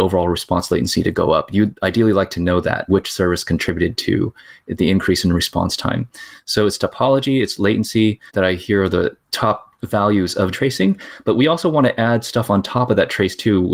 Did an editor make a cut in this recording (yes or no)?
yes